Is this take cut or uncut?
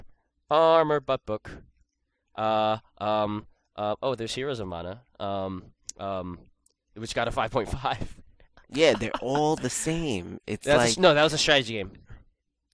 uncut